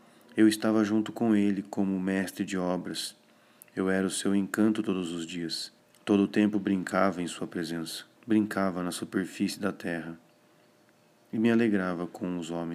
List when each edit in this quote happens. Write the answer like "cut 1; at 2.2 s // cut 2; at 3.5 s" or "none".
cut 1; at 5.8 s // cut 2; at 8.2 s